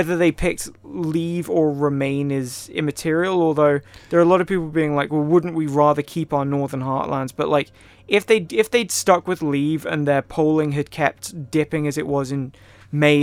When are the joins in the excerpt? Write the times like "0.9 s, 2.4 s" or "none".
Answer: none